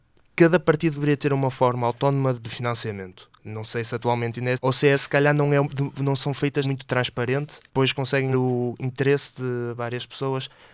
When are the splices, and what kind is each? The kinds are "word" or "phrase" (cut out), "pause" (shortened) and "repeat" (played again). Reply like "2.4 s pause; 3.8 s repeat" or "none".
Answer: 2.3 s word; 3.3 s pause; 4.5 s word; 4.9 s word; 6.6 s phrase; 7.7 s pause; 8.3 s word

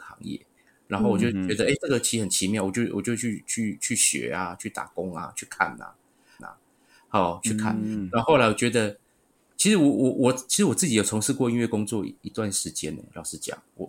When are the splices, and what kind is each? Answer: 6.4 s repeat

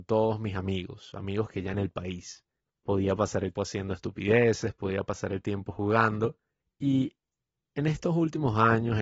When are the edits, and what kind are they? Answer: 1.7 s phrase; 2.6 s pause; 3.6 s word; 6.6 s pause

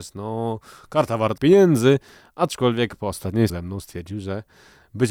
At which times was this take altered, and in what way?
1.4 s word; 3.5 s word

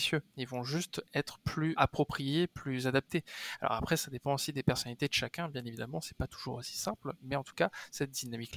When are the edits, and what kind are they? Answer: 1.8 s word

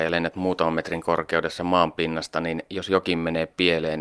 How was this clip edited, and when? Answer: none

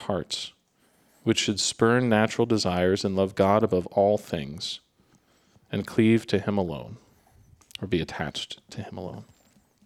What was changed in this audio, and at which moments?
none

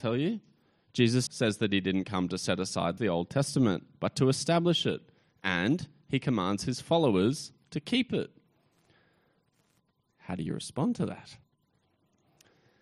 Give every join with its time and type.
1.3 s word; 3.0 s phrase

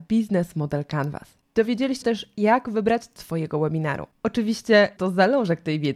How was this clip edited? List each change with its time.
2.0 s word; 3.2 s word; 5.0 s word

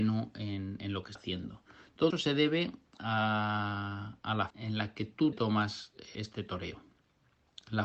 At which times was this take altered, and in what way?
1.2 s word; 2.1 s word; 4.5 s word; 5.3 s word; 6.1 s word

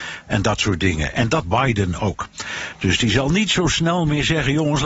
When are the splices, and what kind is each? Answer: 1.4 s word

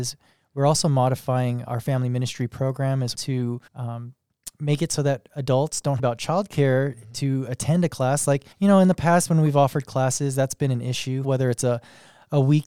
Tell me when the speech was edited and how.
1.7 s word; 3.1 s word; 3.7 s pause; 6.0 s phrase; 8.5 s pause; 11.2 s phrase

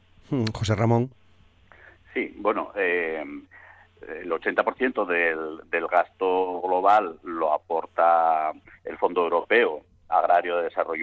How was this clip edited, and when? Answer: none

